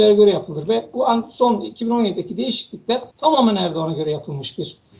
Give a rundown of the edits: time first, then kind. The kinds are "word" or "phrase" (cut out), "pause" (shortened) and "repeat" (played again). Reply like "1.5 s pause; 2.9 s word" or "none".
3.1 s pause